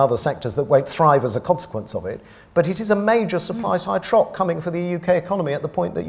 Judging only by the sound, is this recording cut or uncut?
uncut